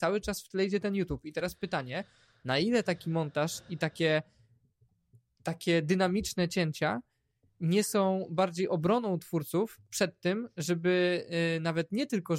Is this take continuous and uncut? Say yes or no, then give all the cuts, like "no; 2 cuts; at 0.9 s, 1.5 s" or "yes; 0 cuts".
yes; 0 cuts